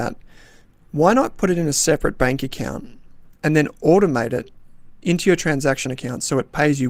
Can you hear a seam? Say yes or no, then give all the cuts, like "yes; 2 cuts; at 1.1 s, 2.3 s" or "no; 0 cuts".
no; 0 cuts